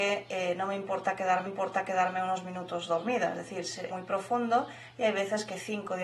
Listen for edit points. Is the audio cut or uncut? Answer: cut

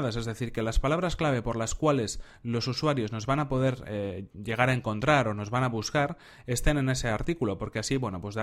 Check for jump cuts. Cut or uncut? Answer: uncut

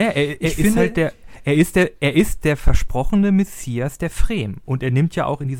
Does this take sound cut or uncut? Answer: uncut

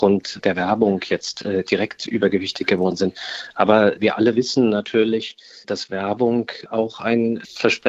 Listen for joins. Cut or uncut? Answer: uncut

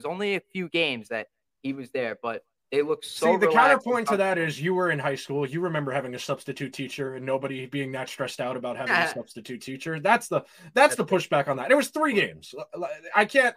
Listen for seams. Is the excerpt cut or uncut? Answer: uncut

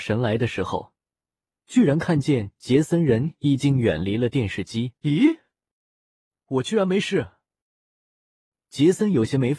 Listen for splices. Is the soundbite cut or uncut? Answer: cut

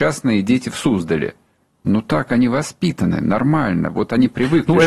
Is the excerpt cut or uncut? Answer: uncut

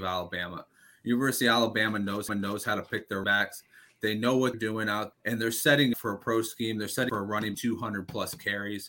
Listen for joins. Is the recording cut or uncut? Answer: cut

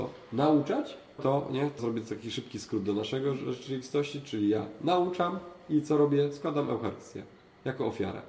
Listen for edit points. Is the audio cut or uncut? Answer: cut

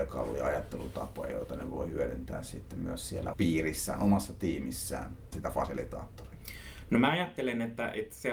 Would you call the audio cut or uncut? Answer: cut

